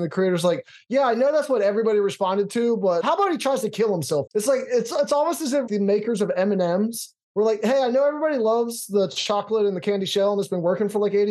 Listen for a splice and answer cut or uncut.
cut